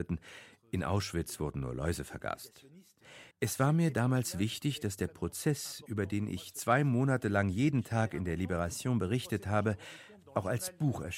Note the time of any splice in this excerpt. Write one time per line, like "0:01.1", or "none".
0:03.3